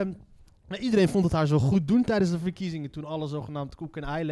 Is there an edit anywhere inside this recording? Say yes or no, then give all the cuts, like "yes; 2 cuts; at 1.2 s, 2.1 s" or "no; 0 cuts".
no; 0 cuts